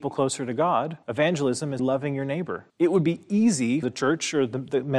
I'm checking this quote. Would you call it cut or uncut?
cut